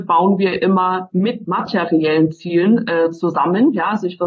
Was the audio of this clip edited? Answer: yes; 1 cut; at 1.5 s

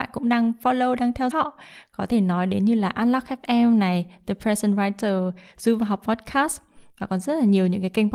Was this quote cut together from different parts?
yes; 1 cut; at 1.3 s

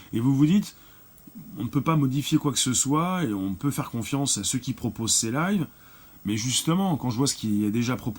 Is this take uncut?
yes; 0 cuts

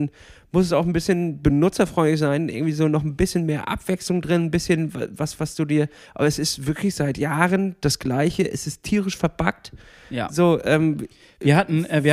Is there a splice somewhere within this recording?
no; 0 cuts

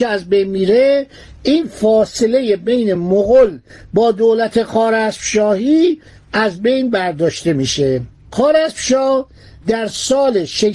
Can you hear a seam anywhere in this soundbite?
no; 0 cuts

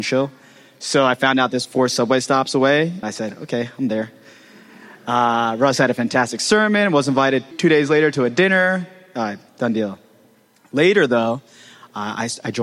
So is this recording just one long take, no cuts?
no; 4 cuts; at 1.6 s, 3.0 s, 7.5 s, 9.5 s

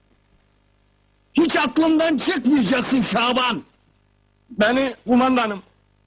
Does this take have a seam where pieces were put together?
yes; 1 cut; at 5.1 s

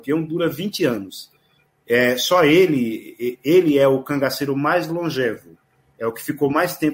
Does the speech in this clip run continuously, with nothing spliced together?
yes; 0 cuts

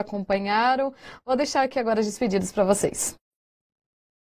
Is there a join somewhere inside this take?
no; 0 cuts

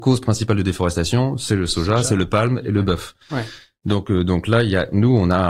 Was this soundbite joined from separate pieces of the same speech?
no; 0 cuts

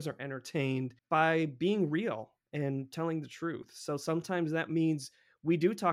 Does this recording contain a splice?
yes; 1 cut; at 1.0 s

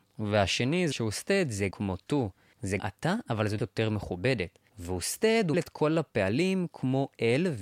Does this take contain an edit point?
yes; 5 cuts; at 0.9 s, 1.7 s, 2.8 s, 3.6 s, 5.5 s

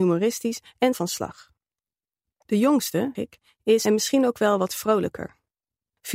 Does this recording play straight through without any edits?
no; 3 cuts; at 0.9 s, 3.2 s, 3.9 s

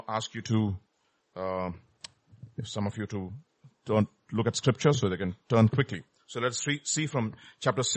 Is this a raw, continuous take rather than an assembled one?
yes; 0 cuts

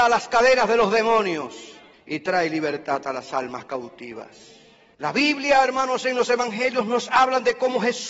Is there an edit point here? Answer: no; 0 cuts

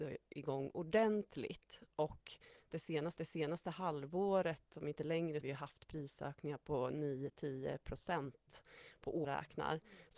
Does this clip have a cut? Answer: yes; 3 cuts; at 3.2 s, 5.4 s, 9.2 s

